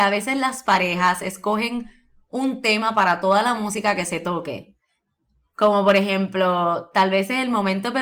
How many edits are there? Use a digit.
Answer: 0